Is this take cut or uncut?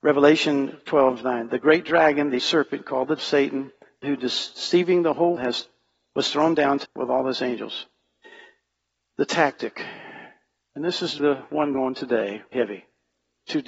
cut